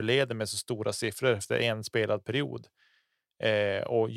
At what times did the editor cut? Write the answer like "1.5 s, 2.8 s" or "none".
none